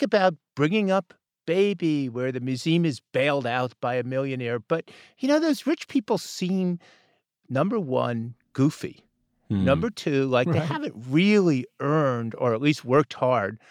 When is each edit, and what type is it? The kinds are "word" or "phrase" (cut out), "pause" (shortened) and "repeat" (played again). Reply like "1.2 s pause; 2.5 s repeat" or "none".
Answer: none